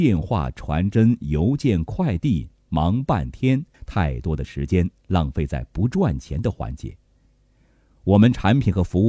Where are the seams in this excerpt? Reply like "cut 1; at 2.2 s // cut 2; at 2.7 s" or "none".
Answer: cut 1; at 3.7 s